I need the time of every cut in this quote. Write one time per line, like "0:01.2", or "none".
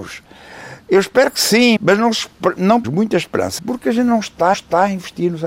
0:01.8
0:02.8
0:03.6
0:04.5

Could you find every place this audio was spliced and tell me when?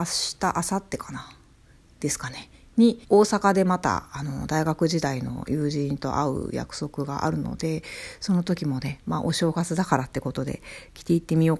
0:03.0

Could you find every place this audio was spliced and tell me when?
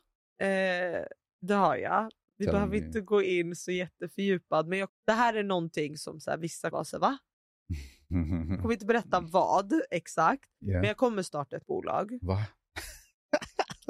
0:04.9
0:06.7
0:08.6
0:11.6

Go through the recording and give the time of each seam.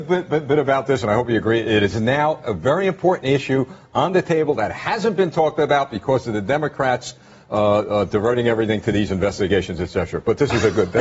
none

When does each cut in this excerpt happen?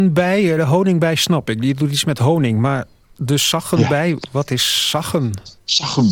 none

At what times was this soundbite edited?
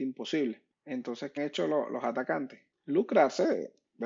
0:01.4

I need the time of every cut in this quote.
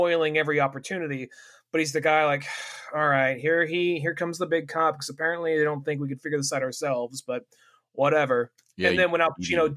none

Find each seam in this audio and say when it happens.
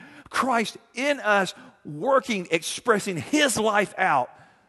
none

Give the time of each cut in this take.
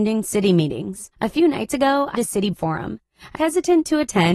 0:01.1
0:02.1
0:02.5
0:03.4

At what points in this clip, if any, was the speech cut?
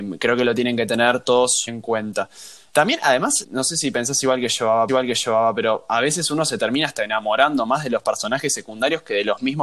0:01.7
0:02.7
0:03.4
0:04.9

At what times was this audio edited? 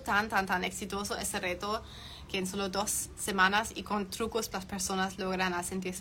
0:04.5

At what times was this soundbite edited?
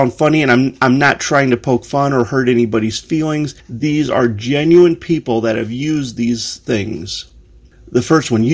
none

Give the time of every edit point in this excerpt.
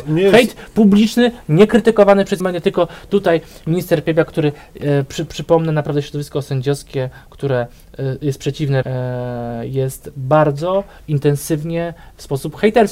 0:02.4
0:08.8

